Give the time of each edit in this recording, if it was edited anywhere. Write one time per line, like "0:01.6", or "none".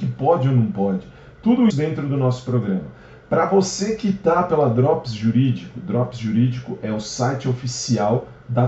0:01.7